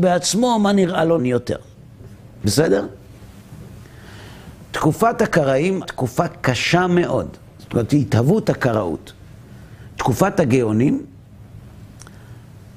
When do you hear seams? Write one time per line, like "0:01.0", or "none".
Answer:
0:01.2
0:05.8